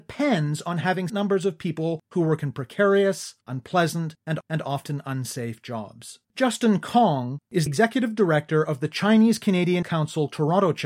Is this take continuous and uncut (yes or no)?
no